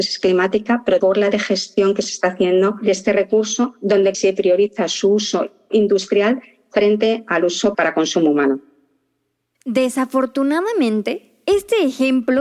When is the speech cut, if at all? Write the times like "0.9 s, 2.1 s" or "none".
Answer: 1.0 s, 1.3 s, 4.1 s, 7.7 s